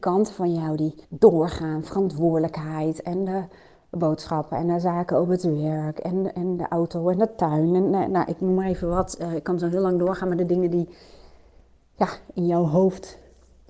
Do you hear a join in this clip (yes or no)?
yes